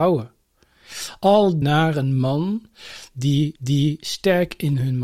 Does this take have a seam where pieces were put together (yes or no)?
yes